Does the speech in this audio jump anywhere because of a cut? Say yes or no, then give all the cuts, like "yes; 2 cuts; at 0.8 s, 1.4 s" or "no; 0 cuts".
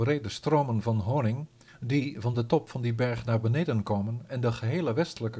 no; 0 cuts